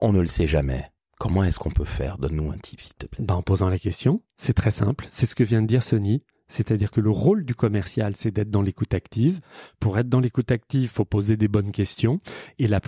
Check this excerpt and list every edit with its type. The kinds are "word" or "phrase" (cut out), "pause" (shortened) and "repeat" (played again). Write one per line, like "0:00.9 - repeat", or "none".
0:01.0 - pause
0:04.3 - pause

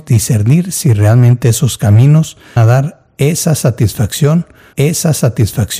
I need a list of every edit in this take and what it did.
0:02.6 - phrase
0:04.7 - repeat

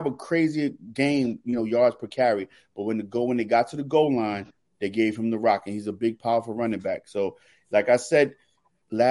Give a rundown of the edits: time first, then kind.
none

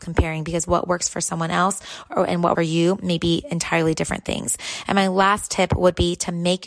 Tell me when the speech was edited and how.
0:02.6 - phrase

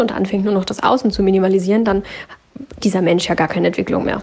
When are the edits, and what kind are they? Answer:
0:02.8 - word

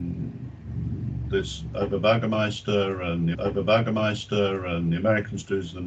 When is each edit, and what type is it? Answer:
0:03.3 - repeat

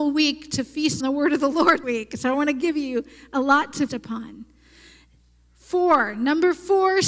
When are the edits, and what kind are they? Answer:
0:01.0 - word
0:01.8 - word
0:03.9 - word

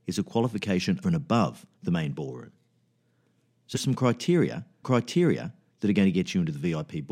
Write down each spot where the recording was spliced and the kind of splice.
0:01.0 - word
0:01.7 - pause
0:03.7 - word
0:04.8 - repeat

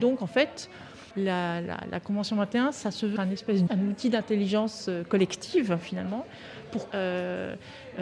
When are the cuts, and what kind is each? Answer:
0:01.1 - pause
0:03.2 - word
0:03.7 - word
0:06.9 - word

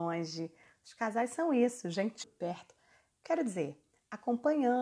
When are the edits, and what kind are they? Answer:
0:02.2 - word

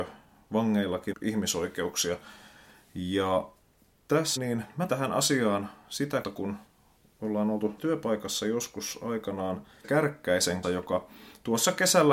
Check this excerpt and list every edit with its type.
0:01.1 - word
0:04.4 - word
0:04.9 - word
0:06.2 - word
0:07.8 - word
0:09.8 - word
0:10.6 - word

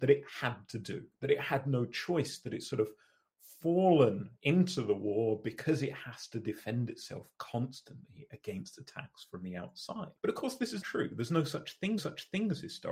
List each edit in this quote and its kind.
0:04.4 - pause
0:10.2 - pause
0:10.8 - word
0:12.0 - repeat

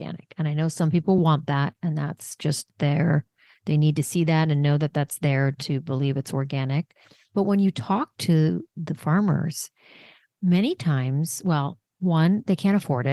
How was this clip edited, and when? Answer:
none

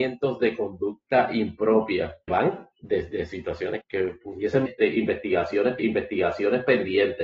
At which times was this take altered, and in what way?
0:02.3 - word
0:02.7 - pause
0:03.8 - word
0:04.7 - phrase
0:05.8 - repeat

